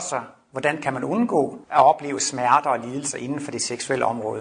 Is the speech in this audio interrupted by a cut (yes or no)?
yes